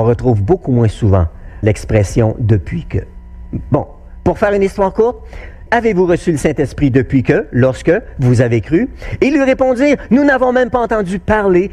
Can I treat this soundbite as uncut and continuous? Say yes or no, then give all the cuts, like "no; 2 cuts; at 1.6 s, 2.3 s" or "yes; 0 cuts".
no; 2 cuts; at 1.6 s, 5.7 s